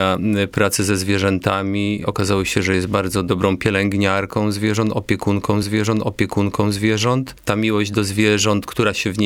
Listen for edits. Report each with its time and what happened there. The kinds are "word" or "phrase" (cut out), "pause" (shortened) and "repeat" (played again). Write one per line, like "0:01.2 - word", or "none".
0:05.6 - repeat